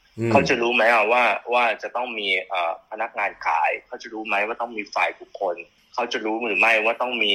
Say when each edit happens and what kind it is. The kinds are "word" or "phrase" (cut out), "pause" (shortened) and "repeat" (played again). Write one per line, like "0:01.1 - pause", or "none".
0:05.8 - pause

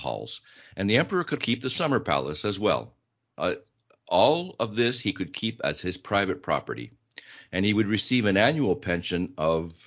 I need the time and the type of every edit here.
0:01.4 - word

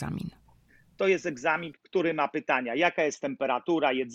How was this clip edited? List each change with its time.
0:01.7 - word

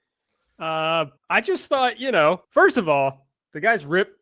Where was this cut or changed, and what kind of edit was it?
0:01.2 - pause
0:02.4 - pause

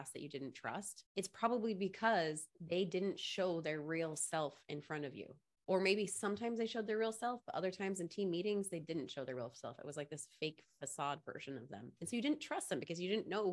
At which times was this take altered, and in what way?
0:01.1 - pause
0:02.5 - pause
0:05.6 - pause

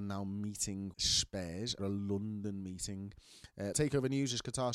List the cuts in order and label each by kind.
0:00.9 - word
0:01.8 - word
0:03.7 - word

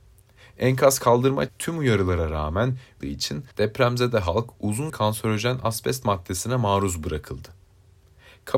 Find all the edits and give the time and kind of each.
0:01.5 - word
0:03.0 - phrase
0:03.5 - pause
0:04.9 - word

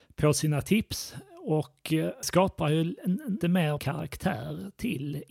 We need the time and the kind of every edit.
0:02.2 - word
0:03.4 - word
0:03.8 - word

